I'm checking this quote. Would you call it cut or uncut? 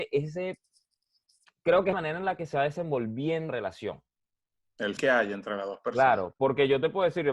cut